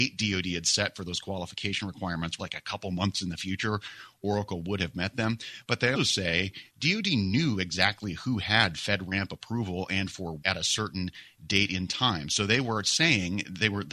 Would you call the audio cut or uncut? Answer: cut